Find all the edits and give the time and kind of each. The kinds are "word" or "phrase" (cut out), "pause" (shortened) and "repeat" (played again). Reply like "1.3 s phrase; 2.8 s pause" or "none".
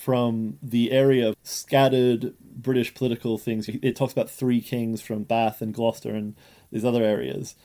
none